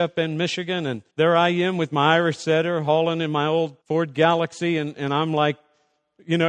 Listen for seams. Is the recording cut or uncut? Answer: cut